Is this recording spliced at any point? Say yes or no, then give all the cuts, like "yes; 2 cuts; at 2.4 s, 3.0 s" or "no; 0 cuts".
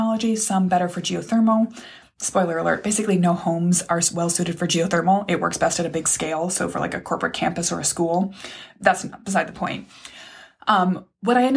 no; 0 cuts